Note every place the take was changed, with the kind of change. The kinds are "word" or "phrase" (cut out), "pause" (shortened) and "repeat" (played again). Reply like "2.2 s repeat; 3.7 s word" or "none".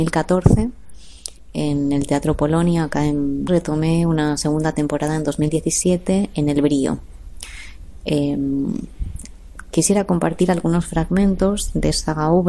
3.5 s phrase